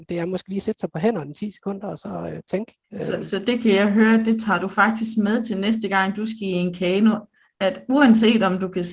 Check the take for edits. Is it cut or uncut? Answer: cut